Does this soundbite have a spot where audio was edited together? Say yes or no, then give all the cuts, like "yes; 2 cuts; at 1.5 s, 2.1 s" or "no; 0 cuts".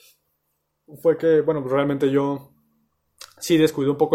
no; 0 cuts